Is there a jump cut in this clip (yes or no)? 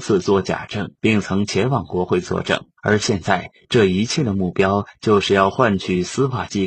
yes